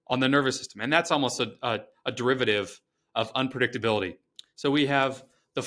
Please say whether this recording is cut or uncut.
uncut